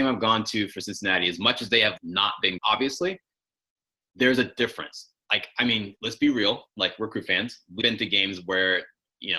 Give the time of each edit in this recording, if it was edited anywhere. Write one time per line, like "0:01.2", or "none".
0:02.0
0:02.6
0:06.0
0:07.8

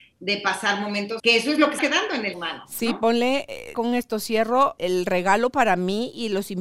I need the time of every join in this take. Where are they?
0:01.2
0:01.8
0:02.3
0:03.7
0:04.8

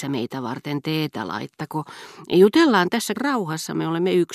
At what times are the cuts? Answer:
0:03.1

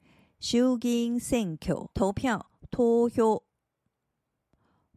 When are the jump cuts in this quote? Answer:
0:01.9

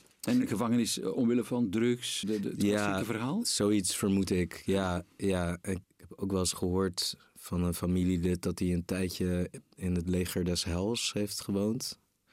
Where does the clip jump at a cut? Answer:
0:02.2
0:05.8

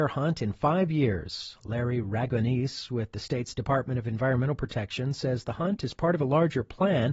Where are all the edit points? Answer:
none

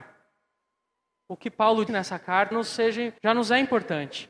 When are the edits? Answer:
0:01.9
0:02.5
0:03.2

